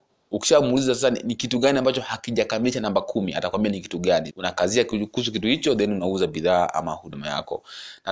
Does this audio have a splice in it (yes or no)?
yes